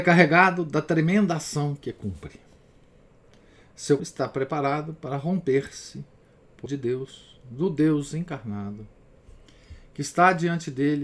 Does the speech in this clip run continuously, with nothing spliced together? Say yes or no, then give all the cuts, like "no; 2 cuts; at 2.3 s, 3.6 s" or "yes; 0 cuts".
no; 2 cuts; at 4.0 s, 6.7 s